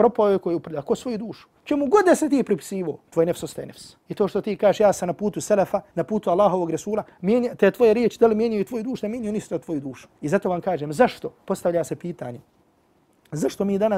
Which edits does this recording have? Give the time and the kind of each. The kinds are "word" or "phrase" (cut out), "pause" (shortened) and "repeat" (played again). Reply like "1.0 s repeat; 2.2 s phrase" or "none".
1.6 s pause; 3.1 s pause; 4.0 s pause; 5.9 s pause; 10.2 s pause